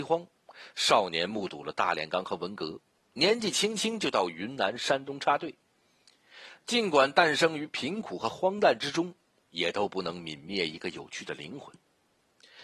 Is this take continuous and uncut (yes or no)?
yes